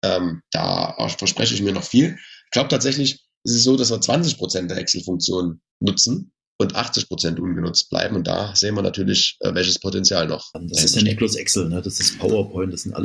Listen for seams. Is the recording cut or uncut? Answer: cut